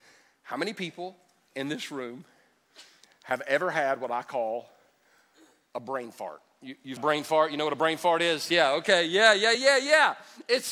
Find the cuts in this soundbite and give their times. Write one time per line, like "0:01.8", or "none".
0:07.0
0:09.5